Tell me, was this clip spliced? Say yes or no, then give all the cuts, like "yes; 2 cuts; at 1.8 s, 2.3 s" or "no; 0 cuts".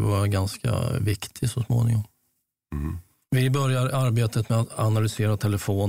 no; 0 cuts